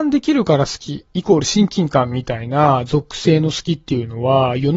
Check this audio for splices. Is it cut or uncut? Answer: cut